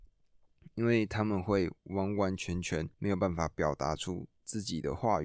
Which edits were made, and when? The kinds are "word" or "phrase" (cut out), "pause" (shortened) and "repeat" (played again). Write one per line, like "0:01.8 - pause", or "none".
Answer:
0:02.9 - pause